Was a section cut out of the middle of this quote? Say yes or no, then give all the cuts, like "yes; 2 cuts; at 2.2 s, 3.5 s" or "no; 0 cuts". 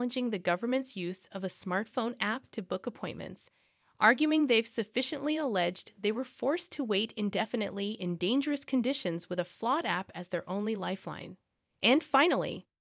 no; 0 cuts